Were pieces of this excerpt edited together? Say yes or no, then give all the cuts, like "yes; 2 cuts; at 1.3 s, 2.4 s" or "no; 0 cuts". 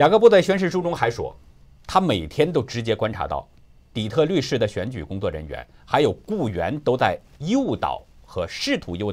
no; 0 cuts